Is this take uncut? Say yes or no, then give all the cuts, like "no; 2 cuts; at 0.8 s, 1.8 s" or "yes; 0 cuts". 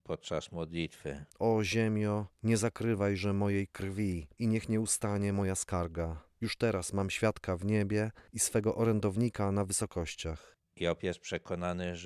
no; 4 cuts; at 1.3 s, 2.3 s, 4.3 s, 8.3 s